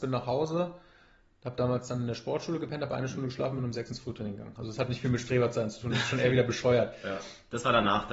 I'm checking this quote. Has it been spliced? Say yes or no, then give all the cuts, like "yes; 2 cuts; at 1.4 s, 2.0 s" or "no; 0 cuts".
no; 0 cuts